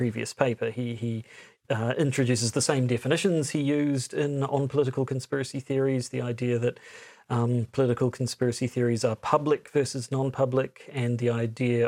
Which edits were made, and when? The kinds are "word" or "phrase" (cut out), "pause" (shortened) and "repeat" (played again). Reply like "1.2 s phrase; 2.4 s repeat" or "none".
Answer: none